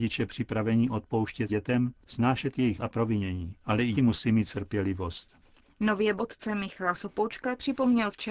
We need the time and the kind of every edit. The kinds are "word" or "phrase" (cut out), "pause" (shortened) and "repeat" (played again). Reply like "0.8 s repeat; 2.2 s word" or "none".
1.5 s word; 2.0 s pause; 2.8 s word; 3.6 s pause; 3.9 s word; 4.5 s word; 6.2 s word